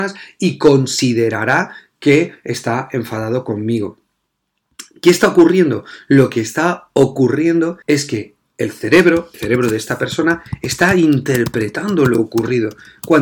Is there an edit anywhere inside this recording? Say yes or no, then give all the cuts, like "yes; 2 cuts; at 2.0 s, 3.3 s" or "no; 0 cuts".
yes; 2 cuts; at 7.8 s, 9.3 s